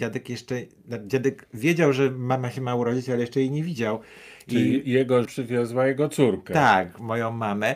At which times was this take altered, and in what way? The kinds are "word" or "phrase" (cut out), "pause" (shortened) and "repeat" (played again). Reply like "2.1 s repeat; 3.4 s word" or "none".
5.2 s word